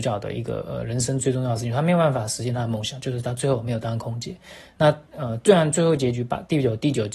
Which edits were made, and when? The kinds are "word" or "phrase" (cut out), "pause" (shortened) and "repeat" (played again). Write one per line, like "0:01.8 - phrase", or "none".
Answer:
0:05.1 - pause